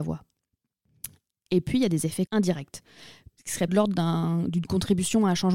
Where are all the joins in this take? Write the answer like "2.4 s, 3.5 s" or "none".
2.3 s, 3.7 s